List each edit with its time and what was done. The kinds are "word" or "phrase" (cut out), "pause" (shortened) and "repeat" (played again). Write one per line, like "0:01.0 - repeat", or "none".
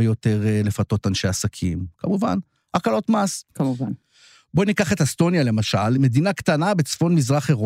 none

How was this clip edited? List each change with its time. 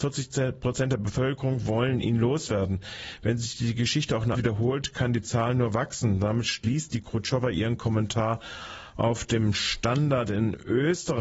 0:04.3 - word

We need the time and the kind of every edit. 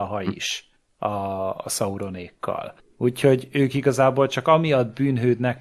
0:02.8 - pause

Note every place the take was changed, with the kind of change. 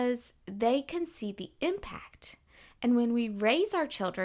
none

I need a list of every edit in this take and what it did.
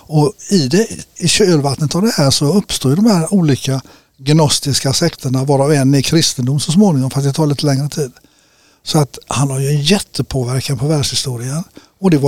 none

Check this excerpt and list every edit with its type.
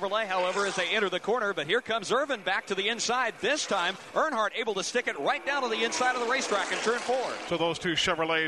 none

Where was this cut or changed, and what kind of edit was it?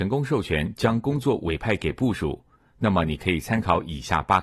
none

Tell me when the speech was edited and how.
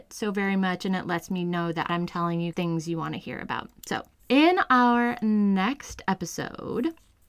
0:02.5 - word

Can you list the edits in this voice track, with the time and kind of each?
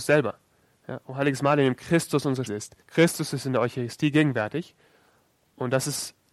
0:02.5 - word
0:02.8 - pause

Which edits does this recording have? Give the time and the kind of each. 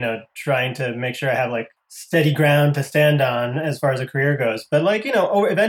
0:01.8 - pause

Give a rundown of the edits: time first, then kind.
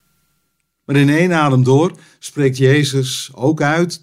none

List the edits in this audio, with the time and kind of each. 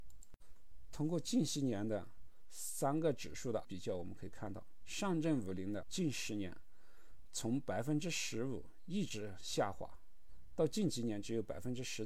0:03.6 - word
0:05.8 - word

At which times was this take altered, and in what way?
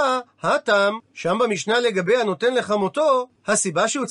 0:01.0 - pause

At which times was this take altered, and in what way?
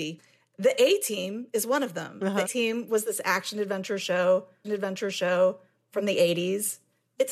0:02.5 - word
0:04.6 - repeat

